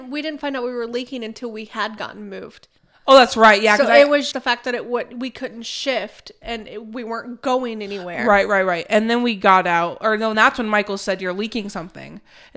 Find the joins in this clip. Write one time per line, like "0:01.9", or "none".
0:02.8
0:04.3
0:10.3

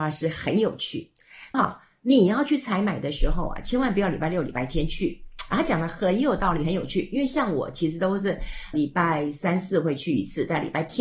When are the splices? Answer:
0:01.5
0:08.7

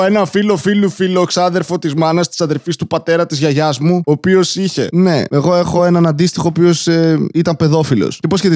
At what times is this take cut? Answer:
none

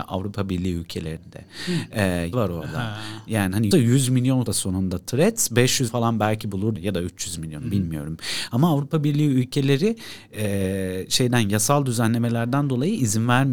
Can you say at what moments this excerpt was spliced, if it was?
0:02.3
0:03.7
0:04.5
0:05.9
0:06.8

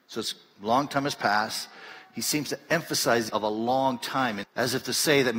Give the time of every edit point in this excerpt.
0:03.3
0:04.4

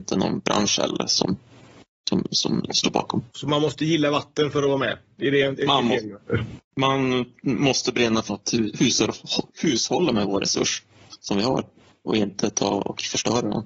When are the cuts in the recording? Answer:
0:08.3

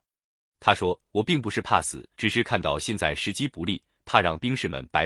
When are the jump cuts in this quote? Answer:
0:02.1

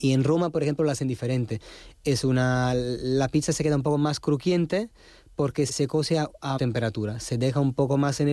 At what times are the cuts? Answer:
0:05.7
0:06.6

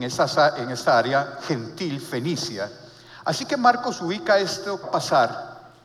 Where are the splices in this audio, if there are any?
0:04.8

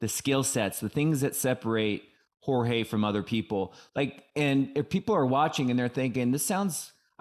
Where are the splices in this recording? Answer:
none

